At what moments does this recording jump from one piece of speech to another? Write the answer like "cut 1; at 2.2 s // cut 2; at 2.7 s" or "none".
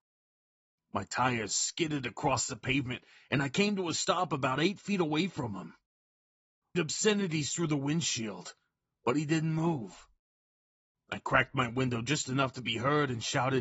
cut 1; at 6.7 s